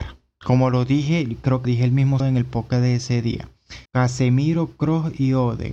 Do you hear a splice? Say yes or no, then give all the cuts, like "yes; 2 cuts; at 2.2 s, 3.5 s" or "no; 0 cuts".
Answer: yes; 3 cuts; at 1.6 s, 2.2 s, 3.9 s